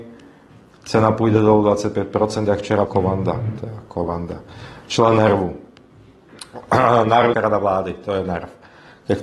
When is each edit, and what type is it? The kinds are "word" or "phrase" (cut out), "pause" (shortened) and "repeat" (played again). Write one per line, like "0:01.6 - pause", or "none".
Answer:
0:02.9 - word
0:07.3 - word